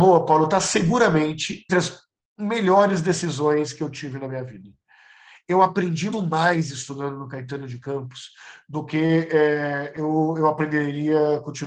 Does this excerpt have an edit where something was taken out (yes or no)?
yes